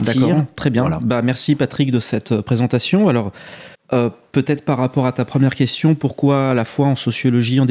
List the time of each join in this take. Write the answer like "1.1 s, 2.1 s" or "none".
3.7 s